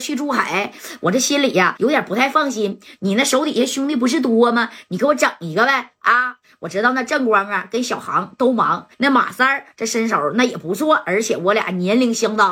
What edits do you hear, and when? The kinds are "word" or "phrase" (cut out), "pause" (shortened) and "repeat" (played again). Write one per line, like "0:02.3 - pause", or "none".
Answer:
0:01.8 - word
0:08.9 - pause